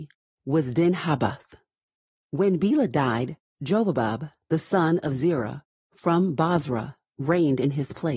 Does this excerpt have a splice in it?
no; 0 cuts

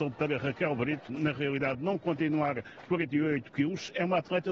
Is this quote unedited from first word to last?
no; 2 cuts; at 1.1 s, 2.9 s

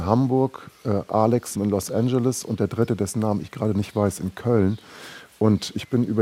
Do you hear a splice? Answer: yes; 1 cut; at 1.6 s

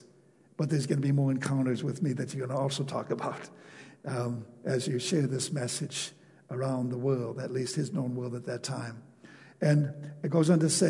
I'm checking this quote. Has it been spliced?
no; 0 cuts

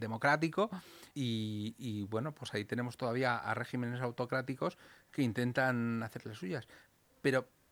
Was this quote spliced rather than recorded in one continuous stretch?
yes; 1 cut; at 1.1 s

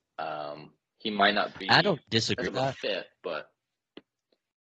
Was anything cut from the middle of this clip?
yes; 1 cut; at 2.5 s

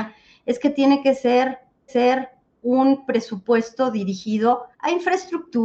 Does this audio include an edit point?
yes; 2 cuts; at 1.9 s, 4.7 s

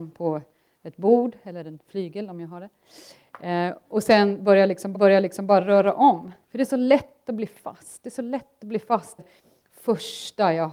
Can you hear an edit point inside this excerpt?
yes; 3 cuts; at 4.9 s, 6.4 s, 9.2 s

